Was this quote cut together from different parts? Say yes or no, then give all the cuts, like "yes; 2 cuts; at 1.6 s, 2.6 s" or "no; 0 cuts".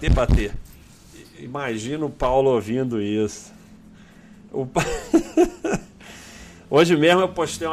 no; 0 cuts